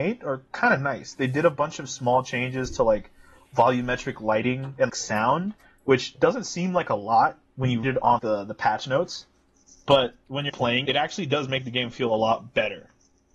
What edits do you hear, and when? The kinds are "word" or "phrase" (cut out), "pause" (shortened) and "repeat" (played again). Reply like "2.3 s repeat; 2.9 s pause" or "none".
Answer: 4.9 s word; 7.8 s word; 8.2 s word; 10.5 s word; 10.8 s word